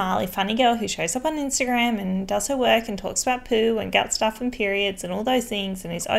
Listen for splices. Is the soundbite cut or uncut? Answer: uncut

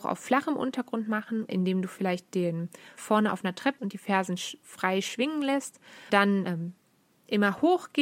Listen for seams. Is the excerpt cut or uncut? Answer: cut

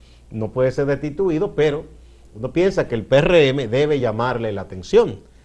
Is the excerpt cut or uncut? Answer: uncut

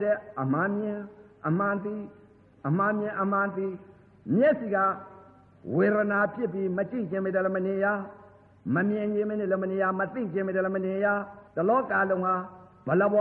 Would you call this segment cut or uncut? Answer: cut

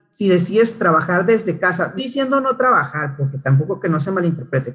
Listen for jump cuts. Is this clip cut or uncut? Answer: cut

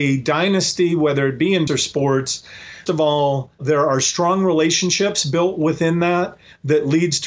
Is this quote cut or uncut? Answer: cut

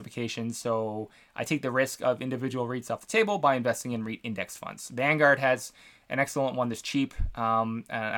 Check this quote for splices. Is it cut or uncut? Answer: uncut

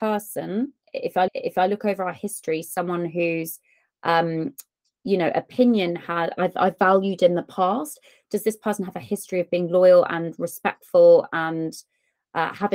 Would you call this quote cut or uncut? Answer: cut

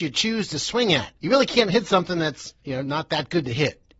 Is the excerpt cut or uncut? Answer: cut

